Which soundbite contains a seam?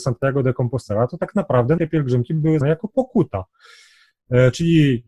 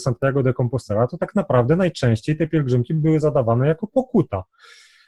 first; 2 cuts; at 1.8 s, 2.6 s

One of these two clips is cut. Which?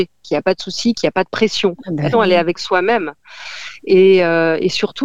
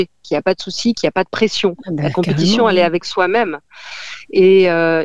first; 1 cut; at 2.1 s

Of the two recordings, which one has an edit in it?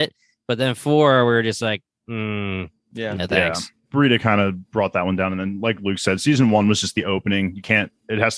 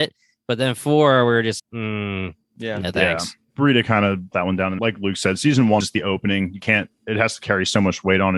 second; 4 cuts; at 1.6 s, 4.3 s, 4.8 s, 5.8 s

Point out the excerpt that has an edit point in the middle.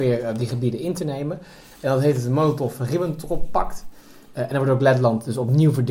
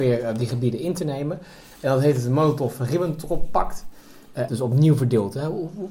second; 1 cut; at 4.5 s

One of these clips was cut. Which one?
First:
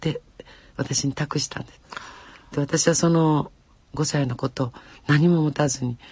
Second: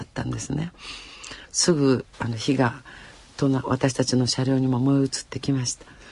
second; 1 cut; at 2.1 s

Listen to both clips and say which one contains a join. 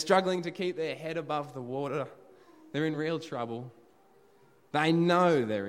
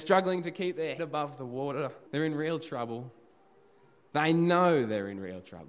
second; 2 cuts; at 1.0 s, 2.1 s

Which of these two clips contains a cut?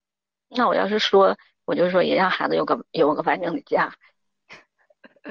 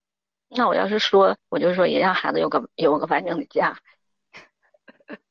second; 1 cut; at 1.4 s

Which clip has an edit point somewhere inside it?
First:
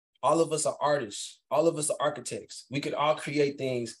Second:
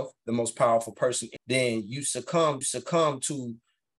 second; 2 cuts; at 1.4 s, 2.6 s

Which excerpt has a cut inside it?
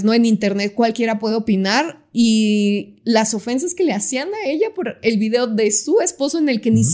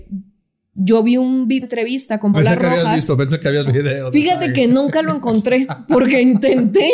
second; 3 cuts; at 1.6 s, 2.3 s, 3.7 s

